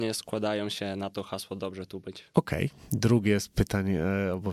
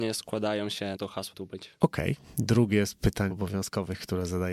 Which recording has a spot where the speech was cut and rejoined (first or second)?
second